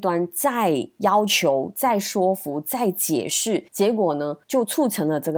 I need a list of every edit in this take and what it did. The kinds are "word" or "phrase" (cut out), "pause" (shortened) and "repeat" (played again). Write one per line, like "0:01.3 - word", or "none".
0:03.7 - pause
0:04.4 - pause